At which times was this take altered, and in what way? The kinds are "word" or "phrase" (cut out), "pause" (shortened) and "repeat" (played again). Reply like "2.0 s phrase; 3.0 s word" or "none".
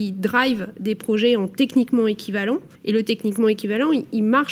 2.8 s pause